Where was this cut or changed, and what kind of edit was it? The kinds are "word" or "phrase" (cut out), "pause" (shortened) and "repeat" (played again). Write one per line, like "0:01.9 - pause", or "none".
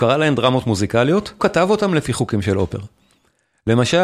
0:01.4 - word